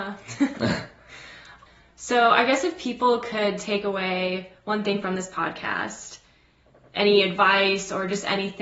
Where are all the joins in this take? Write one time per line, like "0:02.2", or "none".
none